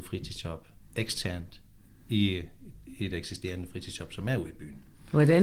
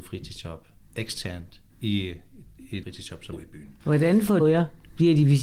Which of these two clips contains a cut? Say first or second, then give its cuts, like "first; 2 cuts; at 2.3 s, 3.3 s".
second; 5 cuts; at 1.7 s, 2.8 s, 3.3 s, 3.8 s, 4.4 s